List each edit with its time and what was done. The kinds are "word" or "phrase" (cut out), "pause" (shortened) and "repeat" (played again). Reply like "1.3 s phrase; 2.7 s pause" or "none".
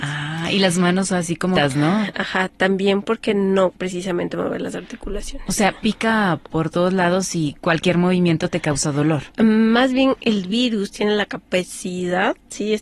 1.6 s word; 3.8 s word